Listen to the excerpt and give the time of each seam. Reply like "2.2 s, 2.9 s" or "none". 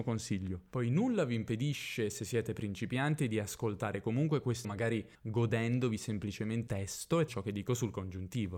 4.6 s, 5.1 s, 6.7 s, 7.3 s